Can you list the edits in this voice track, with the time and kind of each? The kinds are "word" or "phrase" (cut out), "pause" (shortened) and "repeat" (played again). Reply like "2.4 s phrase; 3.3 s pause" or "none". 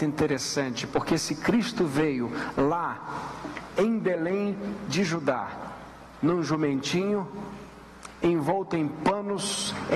none

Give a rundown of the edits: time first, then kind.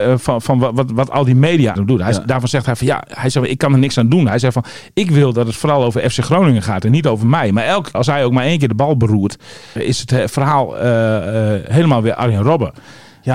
1.8 s phrase; 7.9 s word; 9.8 s word

